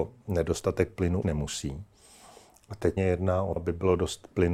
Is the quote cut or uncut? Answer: cut